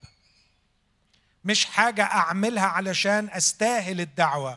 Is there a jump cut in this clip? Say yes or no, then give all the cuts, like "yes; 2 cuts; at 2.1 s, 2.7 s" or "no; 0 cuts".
no; 0 cuts